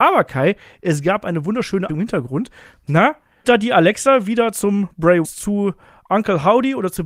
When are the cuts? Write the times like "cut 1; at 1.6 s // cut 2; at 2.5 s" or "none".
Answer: cut 1; at 1.9 s // cut 2; at 3.4 s // cut 3; at 5.2 s